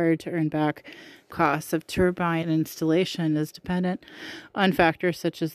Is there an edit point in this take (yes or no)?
yes